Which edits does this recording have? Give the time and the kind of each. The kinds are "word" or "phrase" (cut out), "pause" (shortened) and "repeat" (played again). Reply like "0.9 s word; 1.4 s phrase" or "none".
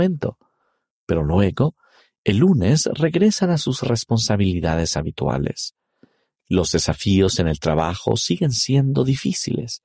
none